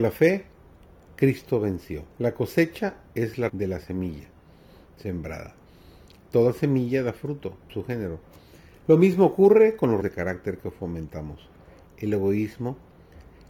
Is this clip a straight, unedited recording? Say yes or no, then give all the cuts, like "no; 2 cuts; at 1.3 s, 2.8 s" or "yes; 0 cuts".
no; 4 cuts; at 2.1 s, 3.5 s, 7.7 s, 10.0 s